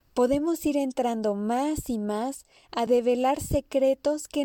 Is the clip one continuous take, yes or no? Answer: yes